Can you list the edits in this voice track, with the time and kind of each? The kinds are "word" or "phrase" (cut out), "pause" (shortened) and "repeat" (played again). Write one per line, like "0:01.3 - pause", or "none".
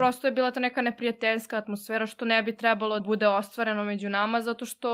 0:03.0 - word